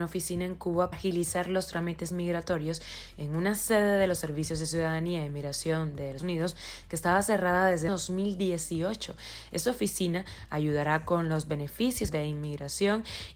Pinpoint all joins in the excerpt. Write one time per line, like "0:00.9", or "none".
0:00.9
0:06.2
0:07.9
0:12.1